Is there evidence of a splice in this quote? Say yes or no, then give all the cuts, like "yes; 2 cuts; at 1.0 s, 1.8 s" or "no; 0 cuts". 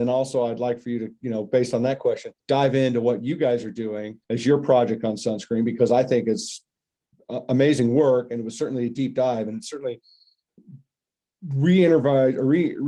yes; 2 cuts; at 2.4 s, 4.2 s